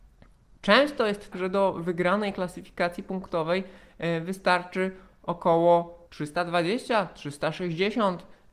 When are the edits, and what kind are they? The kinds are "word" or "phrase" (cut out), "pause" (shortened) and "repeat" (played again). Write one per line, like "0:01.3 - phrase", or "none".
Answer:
0:01.3 - word
0:06.1 - pause